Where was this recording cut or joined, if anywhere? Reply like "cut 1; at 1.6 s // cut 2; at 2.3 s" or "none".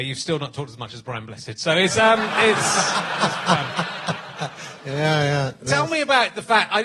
none